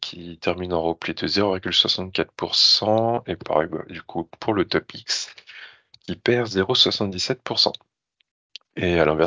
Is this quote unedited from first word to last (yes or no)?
yes